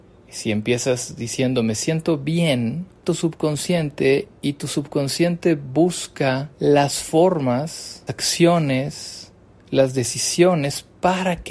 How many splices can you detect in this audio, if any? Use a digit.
3